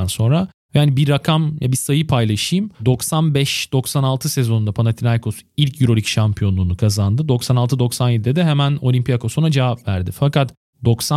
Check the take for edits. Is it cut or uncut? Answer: cut